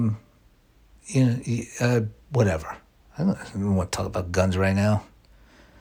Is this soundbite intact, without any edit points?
yes; 0 cuts

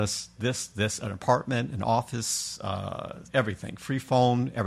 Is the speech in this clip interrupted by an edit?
yes; 1 cut; at 3.3 s

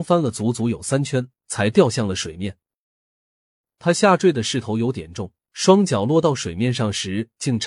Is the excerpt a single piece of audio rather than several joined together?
no; 1 cut; at 5.4 s

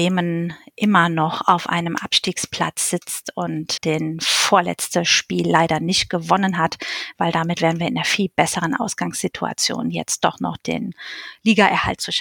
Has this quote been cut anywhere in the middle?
yes; 1 cut; at 3.8 s

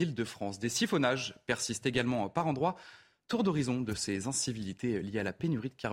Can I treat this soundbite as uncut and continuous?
yes; 0 cuts

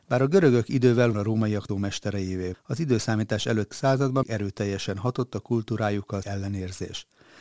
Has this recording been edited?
yes; 6 cuts; at 1.1 s, 1.7 s, 2.5 s, 3.7 s, 4.2 s, 6.2 s

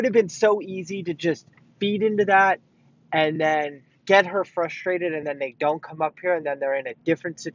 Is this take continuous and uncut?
yes; 0 cuts

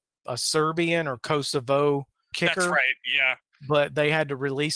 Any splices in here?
yes; 1 cut; at 2.3 s

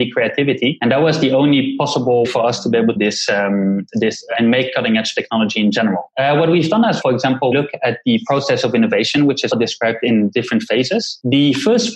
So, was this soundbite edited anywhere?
yes; 6 cuts; at 2.2 s, 3.0 s, 4.3 s, 7.0 s, 7.5 s, 9.5 s

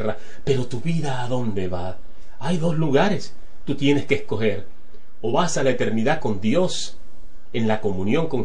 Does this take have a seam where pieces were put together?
no; 0 cuts

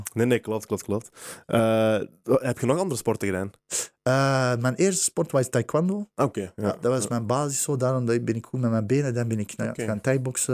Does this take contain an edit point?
yes; 1 cut; at 6.1 s

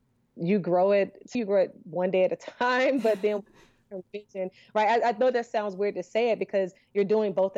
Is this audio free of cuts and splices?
no; 1 cut; at 1.3 s

